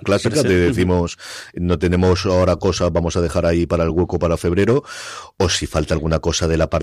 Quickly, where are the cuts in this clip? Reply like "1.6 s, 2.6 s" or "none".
none